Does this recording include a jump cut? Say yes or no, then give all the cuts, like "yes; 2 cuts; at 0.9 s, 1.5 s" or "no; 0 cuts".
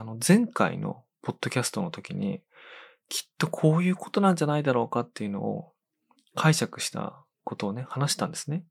yes; 1 cut; at 7.3 s